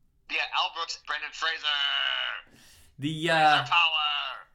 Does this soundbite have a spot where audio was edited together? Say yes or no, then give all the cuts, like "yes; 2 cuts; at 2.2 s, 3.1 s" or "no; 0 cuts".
yes; 1 cut; at 1.0 s